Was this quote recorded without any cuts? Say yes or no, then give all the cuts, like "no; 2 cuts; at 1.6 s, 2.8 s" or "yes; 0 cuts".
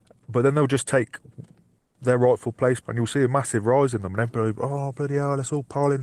no; 1 cut; at 2.8 s